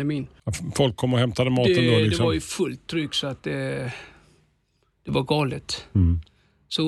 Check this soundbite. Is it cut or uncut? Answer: uncut